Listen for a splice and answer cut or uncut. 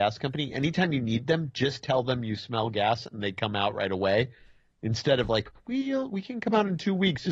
uncut